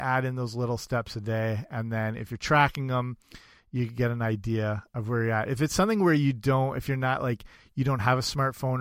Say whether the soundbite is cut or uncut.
uncut